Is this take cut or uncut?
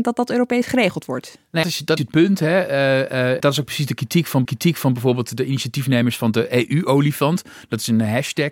cut